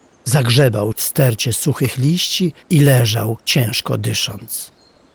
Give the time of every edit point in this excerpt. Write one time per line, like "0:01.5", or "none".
0:00.9
0:02.6
0:03.4